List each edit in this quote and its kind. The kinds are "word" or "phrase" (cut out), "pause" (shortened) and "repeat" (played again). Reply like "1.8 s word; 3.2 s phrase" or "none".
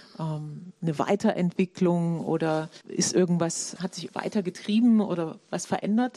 2.8 s pause; 3.8 s word; 4.1 s word